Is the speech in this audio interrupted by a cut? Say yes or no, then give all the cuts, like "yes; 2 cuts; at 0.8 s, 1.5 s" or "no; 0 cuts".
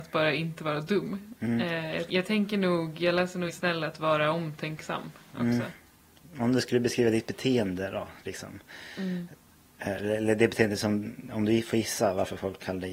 yes; 2 cuts; at 2.1 s, 3.5 s